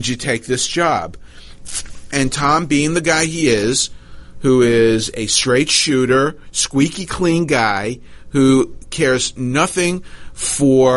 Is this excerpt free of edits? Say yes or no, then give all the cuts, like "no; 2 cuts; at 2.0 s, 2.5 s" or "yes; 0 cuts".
yes; 0 cuts